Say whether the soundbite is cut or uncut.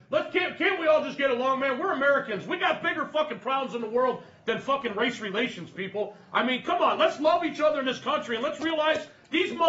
uncut